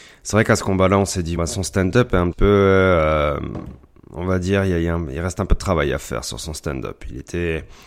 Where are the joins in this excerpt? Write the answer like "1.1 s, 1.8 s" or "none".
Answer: 1.4 s, 2.3 s